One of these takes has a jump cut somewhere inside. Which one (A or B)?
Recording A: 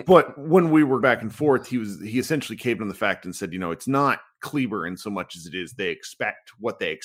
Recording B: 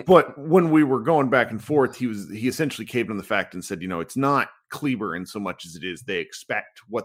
A